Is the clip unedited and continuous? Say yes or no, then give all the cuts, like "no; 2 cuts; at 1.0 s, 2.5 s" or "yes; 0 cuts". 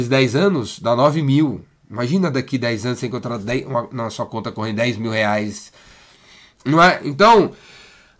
yes; 0 cuts